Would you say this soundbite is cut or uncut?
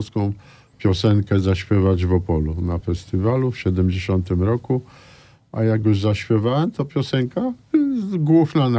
uncut